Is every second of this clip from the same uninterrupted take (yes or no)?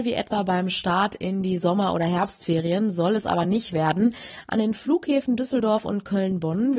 yes